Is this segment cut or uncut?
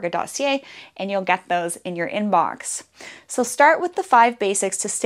uncut